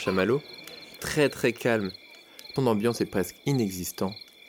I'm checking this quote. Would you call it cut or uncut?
cut